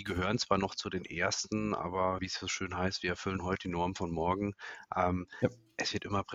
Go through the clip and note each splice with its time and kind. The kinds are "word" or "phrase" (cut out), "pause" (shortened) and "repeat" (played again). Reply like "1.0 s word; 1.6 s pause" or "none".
2.2 s word; 3.4 s word